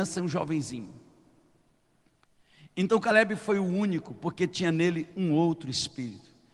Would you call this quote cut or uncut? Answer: uncut